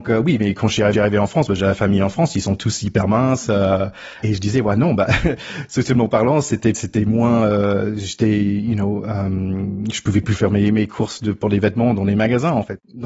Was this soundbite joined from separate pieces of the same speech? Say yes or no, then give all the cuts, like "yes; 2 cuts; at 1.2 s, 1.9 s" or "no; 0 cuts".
yes; 3 cuts; at 0.9 s, 4.2 s, 6.7 s